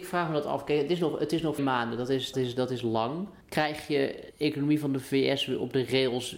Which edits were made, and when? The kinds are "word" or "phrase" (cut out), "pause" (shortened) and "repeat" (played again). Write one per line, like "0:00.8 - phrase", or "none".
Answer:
0:01.6 - word
0:02.3 - word
0:03.4 - pause
0:04.3 - word